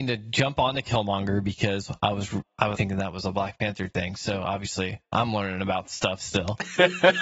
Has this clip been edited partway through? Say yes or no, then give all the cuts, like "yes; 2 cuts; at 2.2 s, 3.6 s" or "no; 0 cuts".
yes; 2 cuts; at 2.7 s, 5.1 s